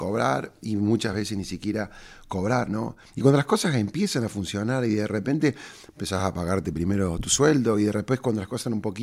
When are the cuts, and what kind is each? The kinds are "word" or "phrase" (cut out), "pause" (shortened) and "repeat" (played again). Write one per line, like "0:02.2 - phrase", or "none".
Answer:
none